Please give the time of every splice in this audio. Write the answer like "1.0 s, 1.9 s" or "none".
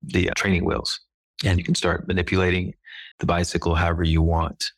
1.6 s, 3.1 s